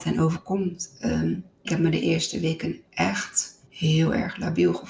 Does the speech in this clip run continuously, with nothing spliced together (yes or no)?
no